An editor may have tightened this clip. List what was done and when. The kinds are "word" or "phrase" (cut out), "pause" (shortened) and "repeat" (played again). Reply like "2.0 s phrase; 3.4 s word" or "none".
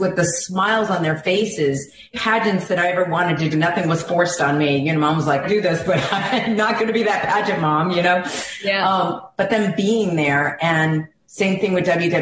2.1 s word; 3.5 s word; 5.4 s phrase